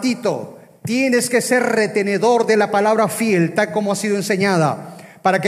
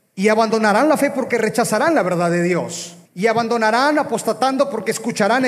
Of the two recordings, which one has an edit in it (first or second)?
second